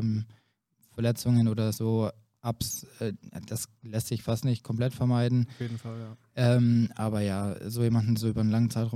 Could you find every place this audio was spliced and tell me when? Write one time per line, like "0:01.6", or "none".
none